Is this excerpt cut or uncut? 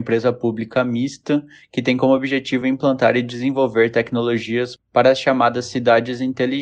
uncut